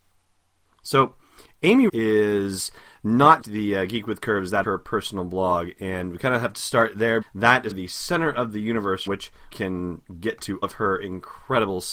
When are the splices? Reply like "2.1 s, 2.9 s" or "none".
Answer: 1.9 s, 3.4 s, 4.6 s, 7.2 s, 7.7 s, 9.1 s, 9.5 s, 10.6 s